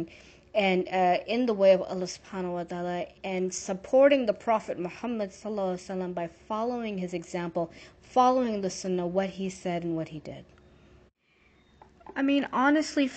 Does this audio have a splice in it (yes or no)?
no